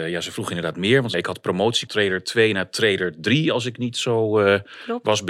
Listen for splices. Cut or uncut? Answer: cut